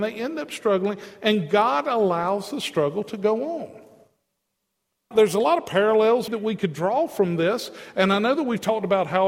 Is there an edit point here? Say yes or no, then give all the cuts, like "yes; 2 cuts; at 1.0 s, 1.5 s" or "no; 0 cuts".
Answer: yes; 2 cuts; at 5.1 s, 6.3 s